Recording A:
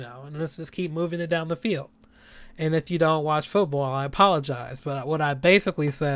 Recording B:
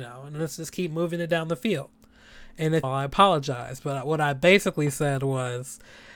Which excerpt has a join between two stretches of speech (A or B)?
B